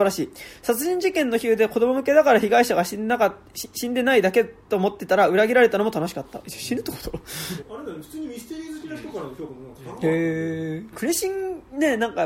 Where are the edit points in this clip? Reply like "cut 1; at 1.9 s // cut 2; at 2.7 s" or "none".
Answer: cut 1; at 7.6 s // cut 2; at 10.9 s